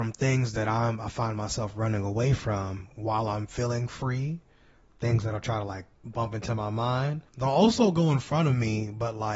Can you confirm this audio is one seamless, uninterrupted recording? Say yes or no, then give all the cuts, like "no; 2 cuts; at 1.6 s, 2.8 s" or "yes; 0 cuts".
no; 2 cuts; at 5.9 s, 7.3 s